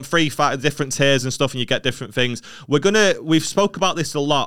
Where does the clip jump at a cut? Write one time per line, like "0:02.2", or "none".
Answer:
none